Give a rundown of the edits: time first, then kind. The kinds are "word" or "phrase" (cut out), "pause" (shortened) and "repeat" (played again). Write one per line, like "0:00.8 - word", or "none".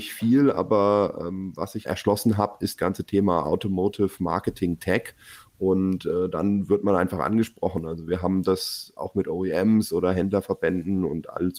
0:01.9 - phrase
0:02.8 - word